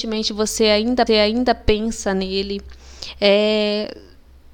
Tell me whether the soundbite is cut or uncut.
cut